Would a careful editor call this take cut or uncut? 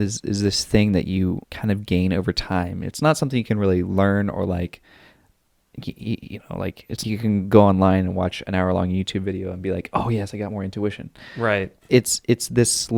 cut